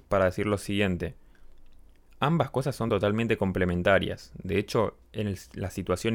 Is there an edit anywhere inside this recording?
no; 0 cuts

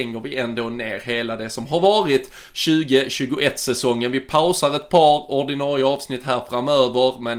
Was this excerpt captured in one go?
yes; 0 cuts

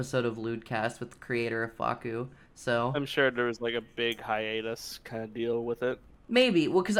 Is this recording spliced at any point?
no; 0 cuts

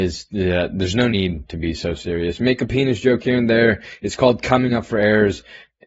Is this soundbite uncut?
yes; 0 cuts

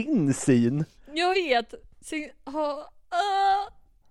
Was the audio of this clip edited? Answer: yes; 1 cut; at 1.3 s

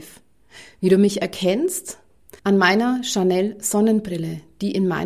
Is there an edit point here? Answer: yes; 1 cut; at 2.4 s

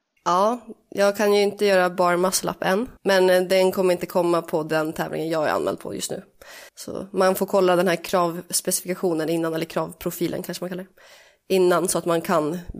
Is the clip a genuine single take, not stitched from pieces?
no; 2 cuts; at 3.0 s, 6.7 s

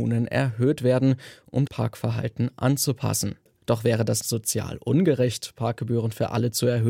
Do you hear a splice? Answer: yes; 2 cuts; at 1.7 s, 4.2 s

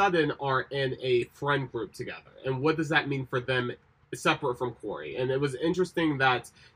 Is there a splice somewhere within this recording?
no; 0 cuts

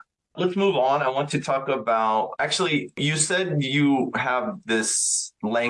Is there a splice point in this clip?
no; 0 cuts

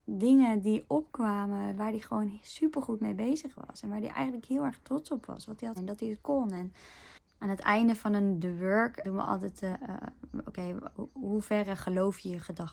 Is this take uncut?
no; 3 cuts; at 5.8 s, 9.0 s, 9.7 s

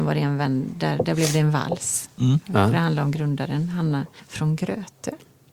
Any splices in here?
no; 0 cuts

